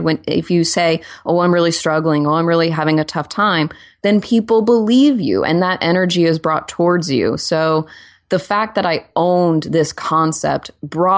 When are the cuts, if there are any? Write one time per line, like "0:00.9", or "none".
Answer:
none